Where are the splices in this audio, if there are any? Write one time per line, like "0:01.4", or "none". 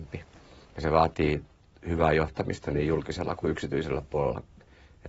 none